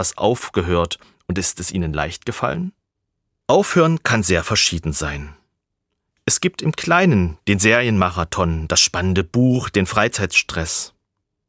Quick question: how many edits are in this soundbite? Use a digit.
0